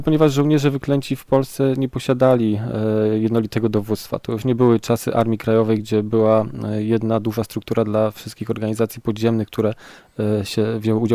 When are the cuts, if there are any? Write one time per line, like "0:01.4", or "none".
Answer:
none